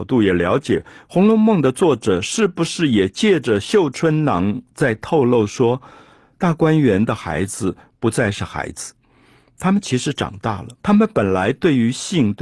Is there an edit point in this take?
yes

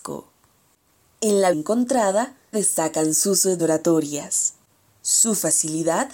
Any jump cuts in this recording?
yes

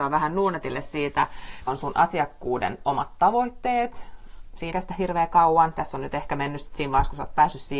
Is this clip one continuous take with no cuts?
no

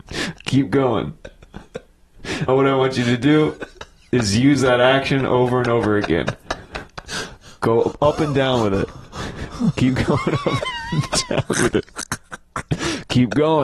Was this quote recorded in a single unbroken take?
no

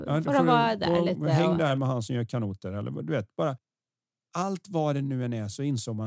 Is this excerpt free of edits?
yes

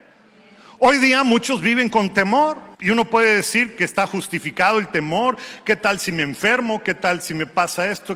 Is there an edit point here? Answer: yes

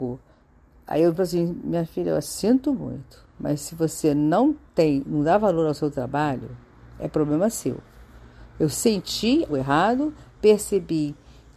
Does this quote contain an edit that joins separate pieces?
yes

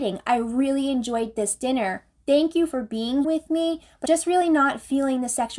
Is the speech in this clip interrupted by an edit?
yes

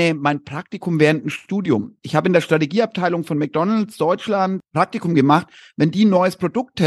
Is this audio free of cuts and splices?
yes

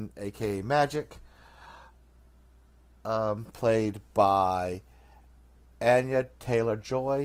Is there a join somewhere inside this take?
no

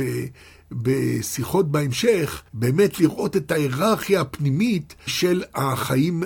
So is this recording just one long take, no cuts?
no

